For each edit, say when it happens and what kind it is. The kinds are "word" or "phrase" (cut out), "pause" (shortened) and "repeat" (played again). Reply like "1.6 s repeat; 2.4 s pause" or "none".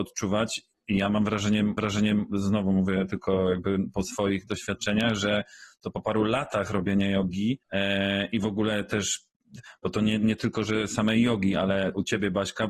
1.8 s repeat; 7.6 s pause

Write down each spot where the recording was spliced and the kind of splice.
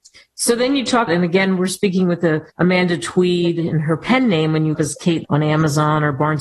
1.1 s word; 2.5 s pause; 4.7 s phrase; 5.2 s word

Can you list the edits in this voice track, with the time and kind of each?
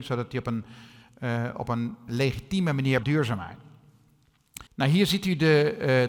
2.1 s word; 3.0 s phrase; 4.7 s pause

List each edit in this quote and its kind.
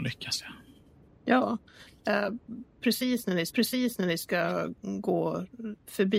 3.5 s repeat

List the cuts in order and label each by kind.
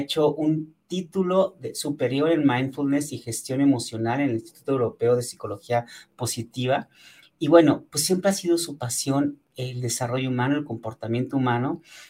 none

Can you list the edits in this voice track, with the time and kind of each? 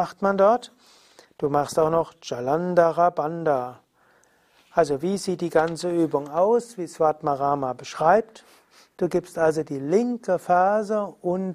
none

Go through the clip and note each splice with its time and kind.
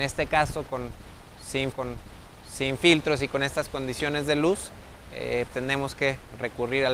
1.7 s repeat; 5.5 s word

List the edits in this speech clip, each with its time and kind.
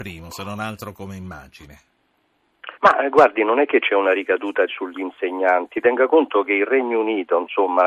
2.7 s pause; 4.7 s word

